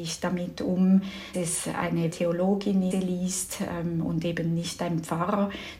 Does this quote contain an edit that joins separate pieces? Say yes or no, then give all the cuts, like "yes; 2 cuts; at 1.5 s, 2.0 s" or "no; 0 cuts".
yes; 3 cuts; at 1.3 s, 2.1 s, 2.9 s